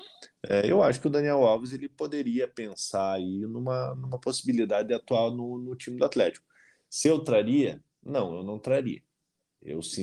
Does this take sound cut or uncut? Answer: uncut